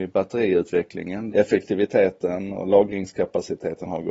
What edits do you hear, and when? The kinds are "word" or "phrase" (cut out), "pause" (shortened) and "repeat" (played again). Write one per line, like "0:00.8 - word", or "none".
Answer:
0:01.3 - word